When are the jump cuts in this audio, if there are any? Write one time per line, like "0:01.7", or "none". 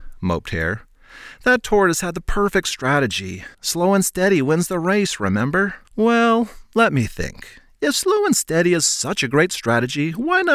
0:03.5
0:05.8